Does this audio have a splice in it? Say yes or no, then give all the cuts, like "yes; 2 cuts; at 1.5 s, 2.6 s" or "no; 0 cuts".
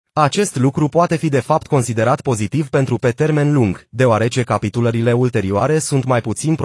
yes; 1 cut; at 3.0 s